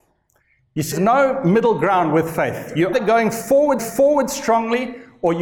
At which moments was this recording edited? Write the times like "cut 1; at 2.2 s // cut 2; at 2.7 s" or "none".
cut 1; at 0.9 s // cut 2; at 2.9 s // cut 3; at 3.8 s